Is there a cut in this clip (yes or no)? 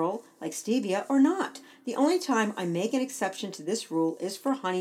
no